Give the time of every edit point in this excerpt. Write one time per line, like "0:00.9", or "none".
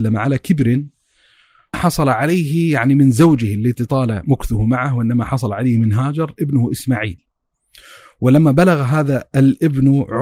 0:01.7